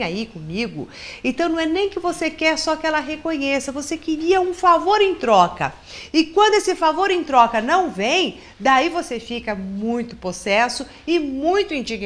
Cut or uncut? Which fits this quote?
uncut